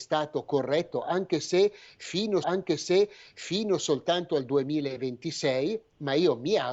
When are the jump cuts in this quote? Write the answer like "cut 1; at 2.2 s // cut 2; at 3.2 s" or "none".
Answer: cut 1; at 2.4 s